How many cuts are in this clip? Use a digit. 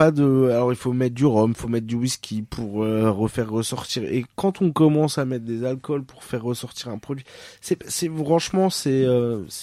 0